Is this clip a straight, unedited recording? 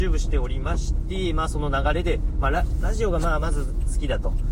yes; 0 cuts

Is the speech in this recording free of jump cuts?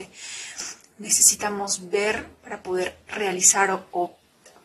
yes; 0 cuts

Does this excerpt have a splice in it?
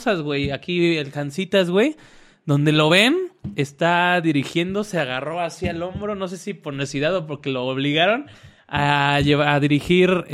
no; 0 cuts

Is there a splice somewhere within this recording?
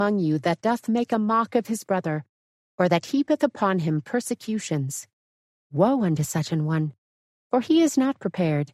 no; 0 cuts

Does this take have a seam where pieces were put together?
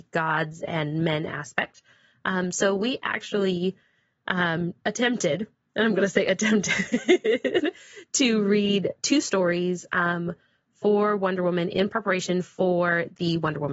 no; 0 cuts

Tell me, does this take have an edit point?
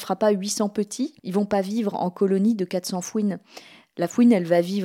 no; 0 cuts

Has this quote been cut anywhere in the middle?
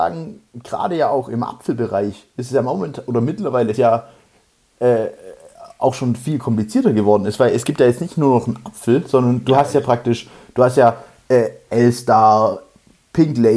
yes; 1 cut; at 3.8 s

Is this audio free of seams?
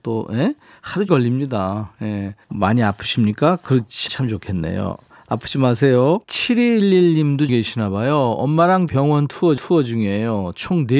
no; 7 cuts; at 1.1 s, 2.4 s, 4.1 s, 6.2 s, 7.5 s, 8.9 s, 9.6 s

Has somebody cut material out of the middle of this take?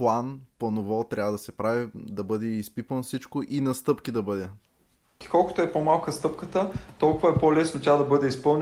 no; 0 cuts

